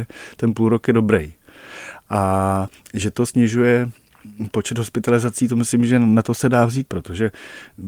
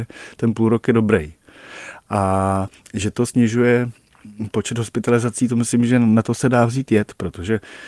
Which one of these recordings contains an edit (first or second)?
first